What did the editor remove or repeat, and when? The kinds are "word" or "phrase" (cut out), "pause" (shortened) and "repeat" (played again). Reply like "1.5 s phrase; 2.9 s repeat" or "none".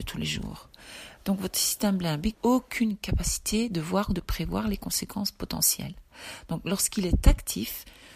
2.3 s word